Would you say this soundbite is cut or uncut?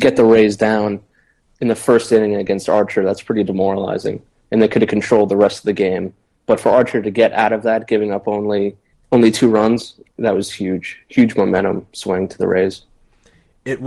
uncut